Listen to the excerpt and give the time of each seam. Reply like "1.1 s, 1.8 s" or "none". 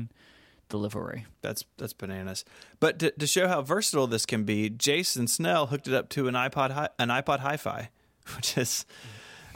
1.3 s

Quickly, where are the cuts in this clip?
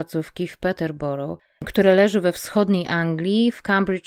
none

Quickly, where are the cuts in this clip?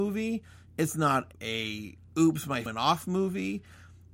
1.3 s, 2.7 s

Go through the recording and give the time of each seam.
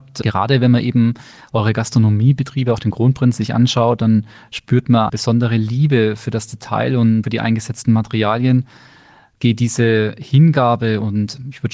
5.1 s, 7.2 s

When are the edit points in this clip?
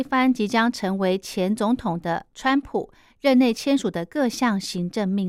none

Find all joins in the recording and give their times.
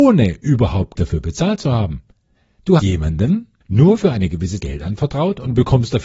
1.0 s, 2.8 s, 4.6 s

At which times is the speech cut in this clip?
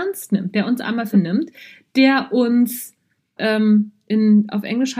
1.1 s, 3.4 s

